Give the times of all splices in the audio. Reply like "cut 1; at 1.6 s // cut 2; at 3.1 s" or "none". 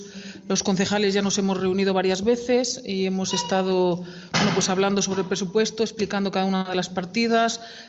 none